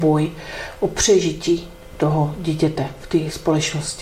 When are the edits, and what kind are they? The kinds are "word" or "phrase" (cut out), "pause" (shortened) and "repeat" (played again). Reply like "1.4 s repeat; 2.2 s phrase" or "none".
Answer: none